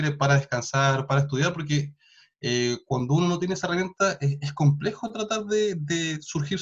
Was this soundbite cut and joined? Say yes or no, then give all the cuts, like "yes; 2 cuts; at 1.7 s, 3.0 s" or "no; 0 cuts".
no; 0 cuts